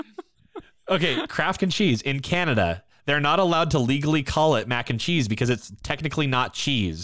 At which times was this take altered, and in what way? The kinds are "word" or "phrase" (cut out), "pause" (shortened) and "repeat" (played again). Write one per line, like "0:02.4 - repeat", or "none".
0:01.6 - word